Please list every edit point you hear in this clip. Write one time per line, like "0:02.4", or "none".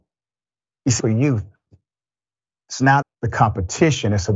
0:01.0
0:03.0